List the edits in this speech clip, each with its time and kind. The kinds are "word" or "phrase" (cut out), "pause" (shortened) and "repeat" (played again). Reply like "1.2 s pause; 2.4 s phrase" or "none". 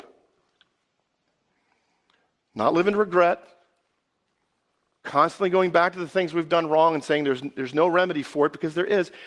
none